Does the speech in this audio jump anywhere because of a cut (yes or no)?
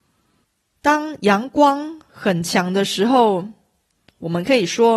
no